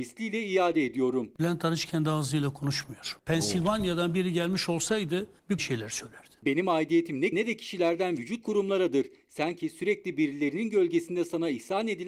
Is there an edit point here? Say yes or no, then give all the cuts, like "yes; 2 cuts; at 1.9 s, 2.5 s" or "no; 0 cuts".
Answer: yes; 3 cuts; at 5.6 s, 7.3 s, 8.4 s